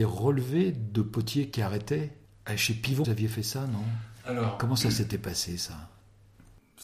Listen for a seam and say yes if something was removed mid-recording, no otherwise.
yes